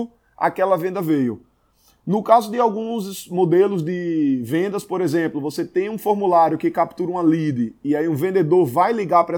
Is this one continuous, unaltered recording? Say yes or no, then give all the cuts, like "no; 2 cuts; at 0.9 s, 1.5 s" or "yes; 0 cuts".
yes; 0 cuts